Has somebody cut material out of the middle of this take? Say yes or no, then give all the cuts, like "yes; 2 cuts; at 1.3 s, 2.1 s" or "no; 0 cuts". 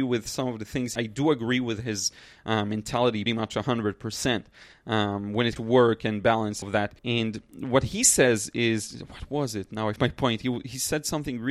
yes; 6 cuts; at 1.0 s, 3.3 s, 5.6 s, 6.6 s, 7.0 s, 10.0 s